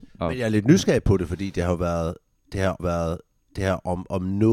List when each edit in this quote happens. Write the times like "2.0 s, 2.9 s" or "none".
2.8 s

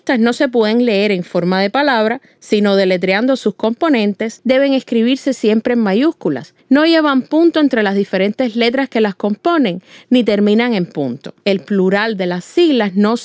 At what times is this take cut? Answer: 11.4 s

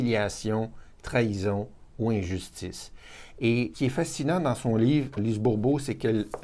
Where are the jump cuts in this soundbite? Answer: 3.7 s, 5.2 s

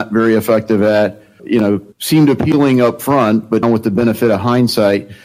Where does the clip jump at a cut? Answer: 1.4 s, 1.9 s, 3.6 s

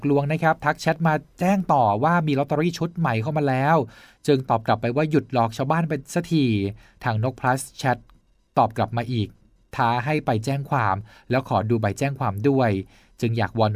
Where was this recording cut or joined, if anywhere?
none

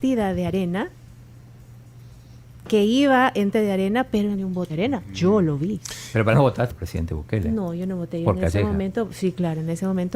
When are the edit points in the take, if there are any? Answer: 3.5 s, 4.3 s, 4.7 s, 6.3 s, 6.7 s

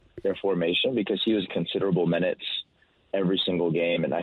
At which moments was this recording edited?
1.5 s

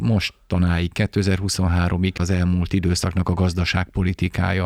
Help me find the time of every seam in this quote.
2.2 s

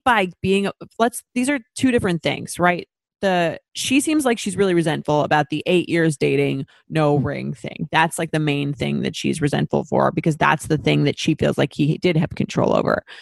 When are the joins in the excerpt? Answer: none

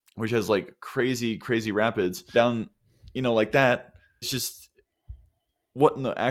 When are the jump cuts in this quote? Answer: 2.3 s, 4.2 s

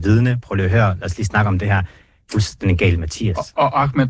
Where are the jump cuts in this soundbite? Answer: 2.3 s

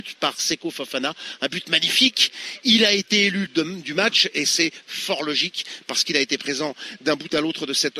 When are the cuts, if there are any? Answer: 3.5 s

